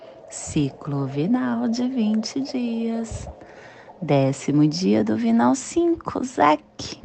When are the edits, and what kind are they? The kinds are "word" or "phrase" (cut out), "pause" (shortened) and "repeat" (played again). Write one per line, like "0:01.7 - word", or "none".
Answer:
none